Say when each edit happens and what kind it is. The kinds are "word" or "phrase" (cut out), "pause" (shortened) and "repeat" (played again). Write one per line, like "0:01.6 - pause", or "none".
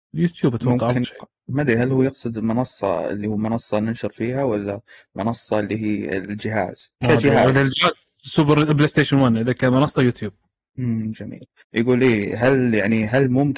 0:01.0 - word
0:07.0 - pause